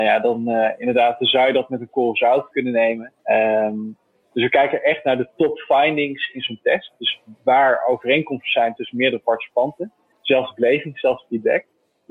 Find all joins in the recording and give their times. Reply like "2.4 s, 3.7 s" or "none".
2.5 s, 3.2 s, 10.1 s